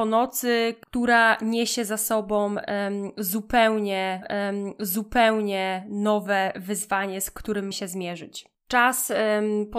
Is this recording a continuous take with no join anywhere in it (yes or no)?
no